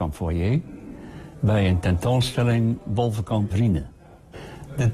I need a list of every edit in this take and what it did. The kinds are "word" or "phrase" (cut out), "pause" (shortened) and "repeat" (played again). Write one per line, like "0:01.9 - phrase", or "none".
0:03.5 - word